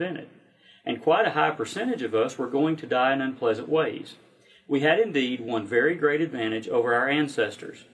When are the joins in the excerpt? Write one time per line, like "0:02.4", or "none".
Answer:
none